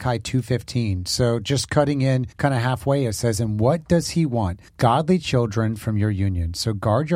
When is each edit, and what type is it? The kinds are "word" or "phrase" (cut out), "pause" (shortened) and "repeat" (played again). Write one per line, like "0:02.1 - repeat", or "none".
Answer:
0:02.3 - pause
0:04.7 - pause